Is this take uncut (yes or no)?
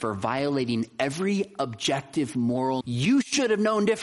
no